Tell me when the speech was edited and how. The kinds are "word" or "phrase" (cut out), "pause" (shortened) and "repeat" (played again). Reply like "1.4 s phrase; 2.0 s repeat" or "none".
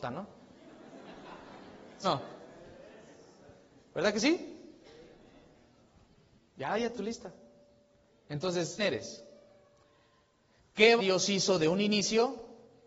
2.0 s word; 6.9 s word; 8.8 s word; 11.0 s word